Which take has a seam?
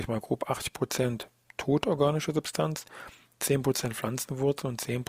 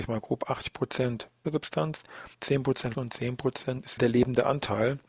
second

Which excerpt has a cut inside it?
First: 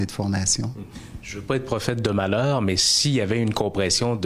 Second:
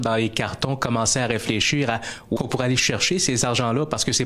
second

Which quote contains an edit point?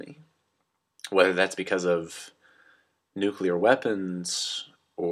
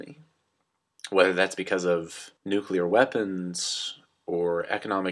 second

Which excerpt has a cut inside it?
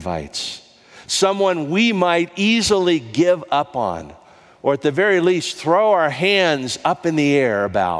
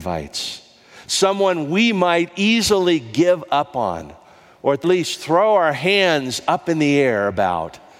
second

